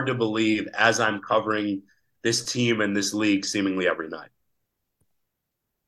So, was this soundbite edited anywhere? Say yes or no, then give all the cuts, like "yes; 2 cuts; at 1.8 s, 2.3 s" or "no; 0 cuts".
no; 0 cuts